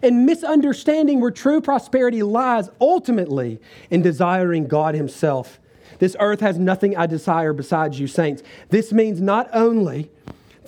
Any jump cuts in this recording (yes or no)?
no